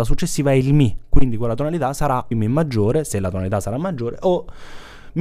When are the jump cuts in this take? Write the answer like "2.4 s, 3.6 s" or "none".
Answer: 2.3 s